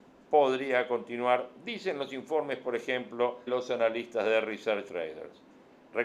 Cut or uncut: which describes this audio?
cut